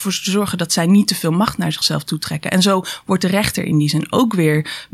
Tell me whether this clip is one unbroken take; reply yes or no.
yes